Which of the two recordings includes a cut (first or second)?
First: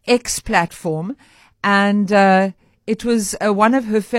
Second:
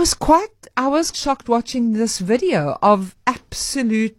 second